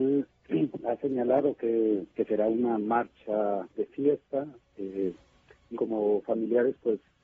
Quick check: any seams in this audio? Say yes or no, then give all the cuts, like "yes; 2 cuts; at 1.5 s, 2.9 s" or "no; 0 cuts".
yes; 3 cuts; at 2.1 s, 3.7 s, 5.7 s